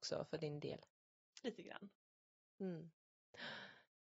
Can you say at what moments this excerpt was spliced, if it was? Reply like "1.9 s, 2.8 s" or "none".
1.4 s